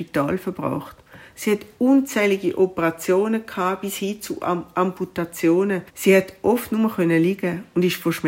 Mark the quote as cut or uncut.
cut